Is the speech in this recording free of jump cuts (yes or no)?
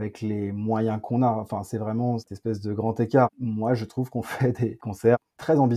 yes